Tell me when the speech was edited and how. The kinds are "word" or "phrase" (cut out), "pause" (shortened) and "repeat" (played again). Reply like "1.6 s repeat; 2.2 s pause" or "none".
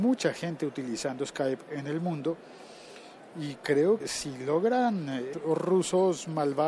4.0 s word; 5.3 s word